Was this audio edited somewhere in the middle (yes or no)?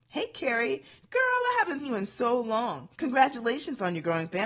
yes